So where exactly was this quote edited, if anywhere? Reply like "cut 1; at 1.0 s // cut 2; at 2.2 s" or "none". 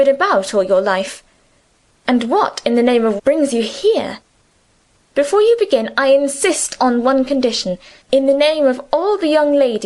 cut 1; at 3.2 s